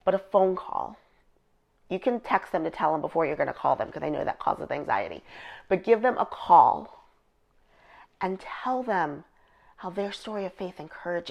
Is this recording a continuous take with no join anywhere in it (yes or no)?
yes